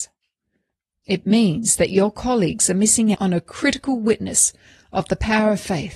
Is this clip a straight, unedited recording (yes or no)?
no